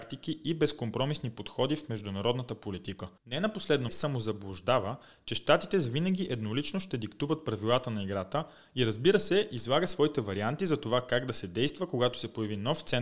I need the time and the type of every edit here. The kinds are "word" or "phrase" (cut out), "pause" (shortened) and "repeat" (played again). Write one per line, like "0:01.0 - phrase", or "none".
0:03.2 - pause
0:03.9 - phrase